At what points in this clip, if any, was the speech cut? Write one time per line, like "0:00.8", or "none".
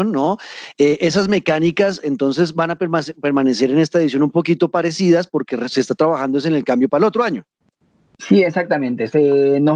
none